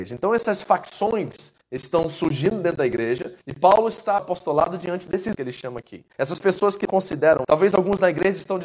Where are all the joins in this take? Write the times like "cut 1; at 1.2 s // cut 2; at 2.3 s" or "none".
cut 1; at 1.6 s // cut 2; at 3.4 s // cut 3; at 4.2 s // cut 4; at 5.3 s // cut 5; at 6.1 s // cut 6; at 6.9 s // cut 7; at 7.4 s